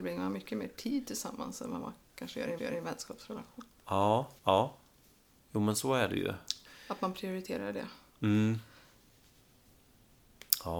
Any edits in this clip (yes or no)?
yes